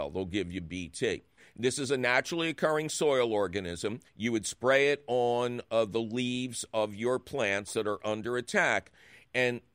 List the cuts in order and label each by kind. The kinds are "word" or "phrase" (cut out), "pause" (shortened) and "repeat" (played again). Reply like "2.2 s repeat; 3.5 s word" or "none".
1.4 s pause; 4.1 s pause